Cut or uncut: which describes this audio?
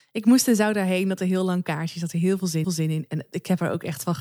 cut